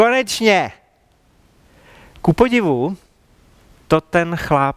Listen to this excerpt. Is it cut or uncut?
uncut